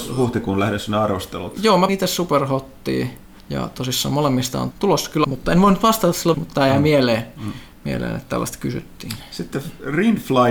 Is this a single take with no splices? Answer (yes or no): no